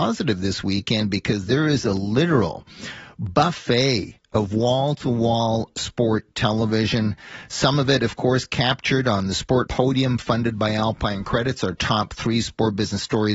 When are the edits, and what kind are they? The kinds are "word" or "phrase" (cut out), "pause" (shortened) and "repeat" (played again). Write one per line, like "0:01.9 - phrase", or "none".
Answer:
0:09.7 - word